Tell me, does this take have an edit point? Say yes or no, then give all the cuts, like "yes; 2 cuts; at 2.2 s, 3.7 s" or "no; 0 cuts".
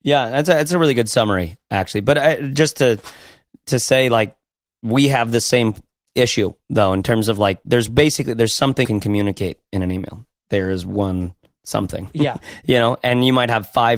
yes; 1 cut; at 8.8 s